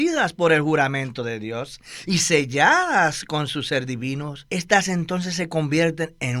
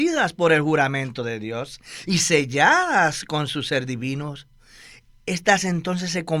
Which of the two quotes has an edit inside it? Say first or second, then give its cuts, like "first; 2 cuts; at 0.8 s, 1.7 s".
first; 1 cut; at 4.5 s